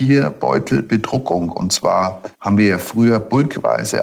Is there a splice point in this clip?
yes; 1 cut; at 2.3 s

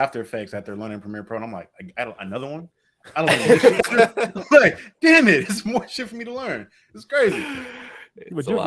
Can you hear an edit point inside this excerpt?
no; 0 cuts

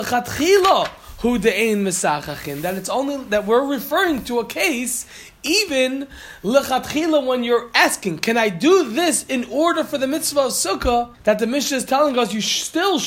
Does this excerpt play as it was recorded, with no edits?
no; 1 cut; at 11.1 s

